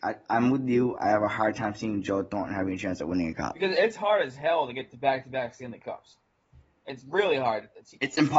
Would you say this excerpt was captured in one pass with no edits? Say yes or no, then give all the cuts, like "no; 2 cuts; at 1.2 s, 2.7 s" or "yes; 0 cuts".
yes; 0 cuts